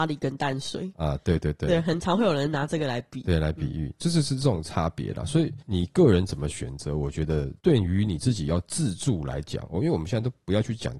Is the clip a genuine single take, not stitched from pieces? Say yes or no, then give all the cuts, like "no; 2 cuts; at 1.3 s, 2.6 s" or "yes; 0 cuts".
yes; 0 cuts